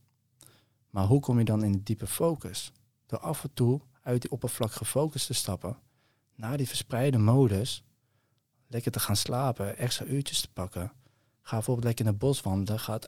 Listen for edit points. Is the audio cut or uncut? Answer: uncut